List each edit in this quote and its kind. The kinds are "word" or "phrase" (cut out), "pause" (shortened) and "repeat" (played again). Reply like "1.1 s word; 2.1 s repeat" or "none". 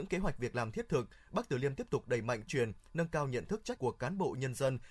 2.5 s word; 3.8 s word